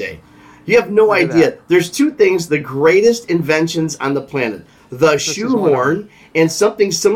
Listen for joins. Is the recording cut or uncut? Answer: uncut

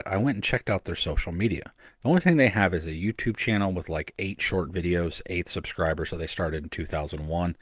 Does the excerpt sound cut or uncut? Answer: uncut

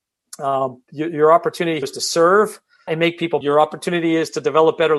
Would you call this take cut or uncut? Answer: cut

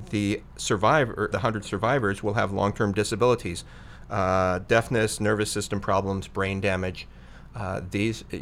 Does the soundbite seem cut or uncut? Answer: cut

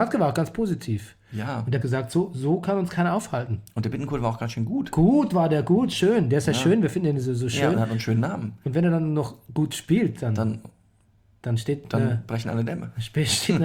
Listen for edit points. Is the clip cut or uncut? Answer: cut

